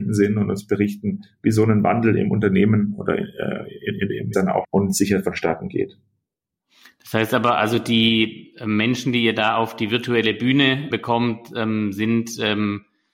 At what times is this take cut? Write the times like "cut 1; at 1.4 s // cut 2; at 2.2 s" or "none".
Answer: cut 1; at 4.3 s // cut 2; at 4.6 s // cut 3; at 10.9 s